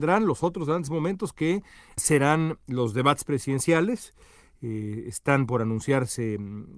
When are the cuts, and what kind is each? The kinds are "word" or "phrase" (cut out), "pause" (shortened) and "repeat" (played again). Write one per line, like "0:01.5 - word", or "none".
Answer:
none